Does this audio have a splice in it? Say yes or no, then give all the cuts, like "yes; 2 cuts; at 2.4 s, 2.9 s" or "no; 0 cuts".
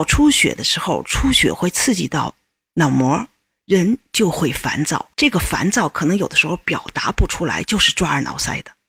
yes; 1 cut; at 5.1 s